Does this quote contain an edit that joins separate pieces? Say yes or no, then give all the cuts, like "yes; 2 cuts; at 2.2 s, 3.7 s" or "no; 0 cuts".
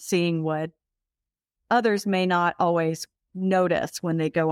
no; 0 cuts